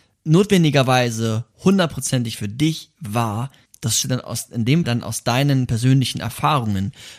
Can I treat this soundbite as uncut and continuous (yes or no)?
no